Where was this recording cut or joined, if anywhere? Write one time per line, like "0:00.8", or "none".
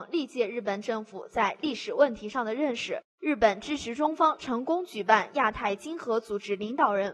0:03.1